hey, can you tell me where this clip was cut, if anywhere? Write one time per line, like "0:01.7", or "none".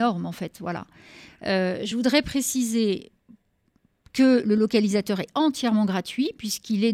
none

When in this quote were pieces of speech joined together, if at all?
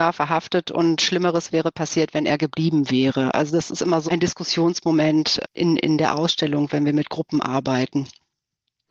0:01.0
0:04.1
0:05.4

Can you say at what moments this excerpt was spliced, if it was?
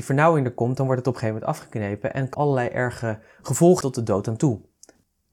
0:02.3
0:03.8

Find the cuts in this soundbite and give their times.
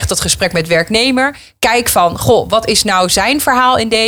none

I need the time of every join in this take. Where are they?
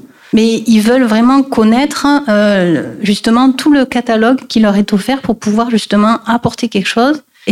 none

